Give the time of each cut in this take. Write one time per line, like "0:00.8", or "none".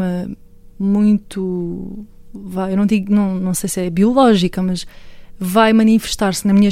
none